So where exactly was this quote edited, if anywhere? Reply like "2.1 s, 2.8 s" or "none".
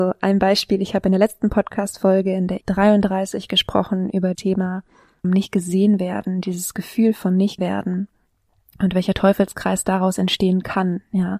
2.6 s, 4.3 s, 5.2 s, 7.6 s